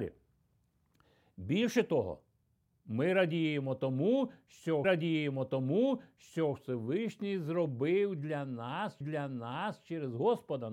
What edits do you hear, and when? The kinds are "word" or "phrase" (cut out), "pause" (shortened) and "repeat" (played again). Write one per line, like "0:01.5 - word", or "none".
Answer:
0:04.8 - repeat
0:09.0 - repeat